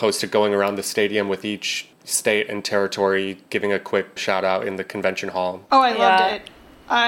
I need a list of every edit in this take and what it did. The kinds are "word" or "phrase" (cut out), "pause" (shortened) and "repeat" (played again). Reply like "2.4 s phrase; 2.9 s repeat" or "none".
1.9 s pause; 4.2 s word